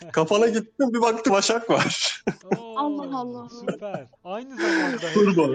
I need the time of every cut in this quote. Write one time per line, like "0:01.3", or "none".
0:01.3
0:04.2